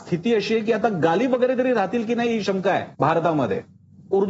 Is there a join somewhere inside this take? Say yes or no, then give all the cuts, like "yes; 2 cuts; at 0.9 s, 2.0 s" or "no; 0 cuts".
yes; 1 cut; at 2.9 s